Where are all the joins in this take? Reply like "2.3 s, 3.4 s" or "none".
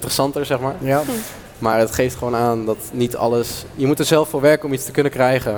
none

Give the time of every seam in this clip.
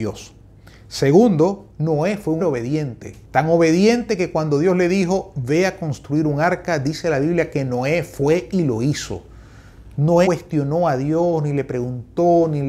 1.7 s, 2.4 s, 3.2 s, 10.2 s

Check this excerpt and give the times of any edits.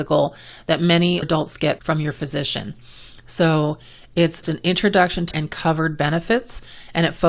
1.2 s, 1.8 s, 4.4 s, 5.3 s

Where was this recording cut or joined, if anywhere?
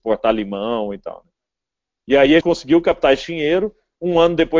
2.4 s

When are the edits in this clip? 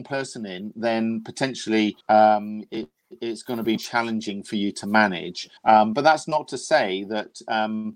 2.0 s, 3.8 s, 5.6 s

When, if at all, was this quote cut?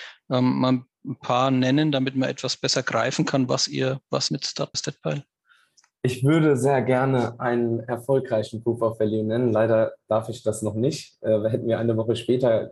4.3 s, 4.7 s

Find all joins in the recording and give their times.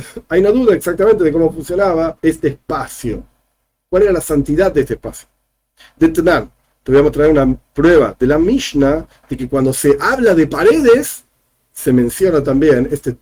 2.2 s

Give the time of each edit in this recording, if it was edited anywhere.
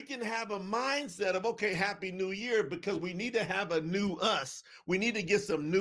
none

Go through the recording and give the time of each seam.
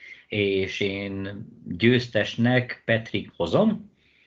3.3 s

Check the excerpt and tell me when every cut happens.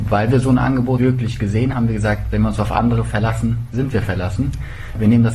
1.0 s, 1.7 s

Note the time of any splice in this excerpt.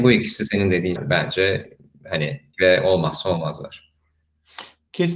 1.0 s, 2.5 s

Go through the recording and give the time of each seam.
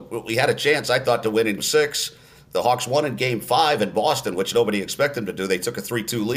1.6 s

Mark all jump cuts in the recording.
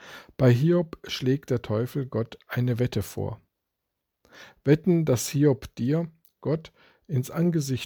none

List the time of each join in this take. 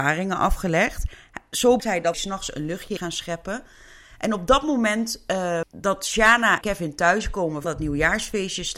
1.8 s, 2.1 s, 3.0 s, 5.6 s, 6.6 s, 7.6 s

